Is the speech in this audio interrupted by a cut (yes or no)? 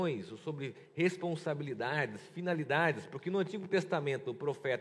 no